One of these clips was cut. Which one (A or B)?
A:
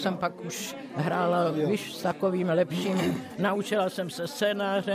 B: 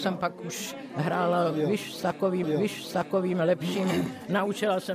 B